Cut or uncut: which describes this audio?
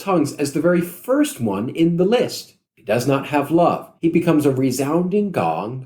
cut